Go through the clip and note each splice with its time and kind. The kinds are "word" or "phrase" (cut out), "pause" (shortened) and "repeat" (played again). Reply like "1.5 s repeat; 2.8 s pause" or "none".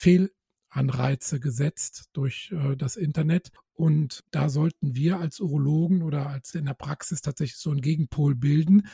4.3 s pause; 6.5 s word